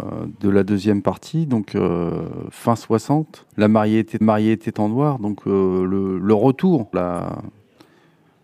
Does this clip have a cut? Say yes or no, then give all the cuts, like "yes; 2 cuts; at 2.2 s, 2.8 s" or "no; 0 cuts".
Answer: yes; 3 cuts; at 3.5 s, 4.2 s, 6.9 s